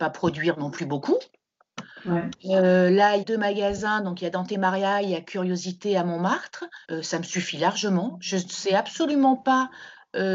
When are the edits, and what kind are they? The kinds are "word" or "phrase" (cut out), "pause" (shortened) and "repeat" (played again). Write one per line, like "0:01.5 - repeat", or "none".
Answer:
0:03.2 - phrase
0:06.8 - pause